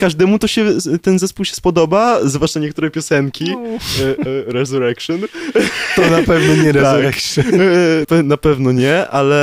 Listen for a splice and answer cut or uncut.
cut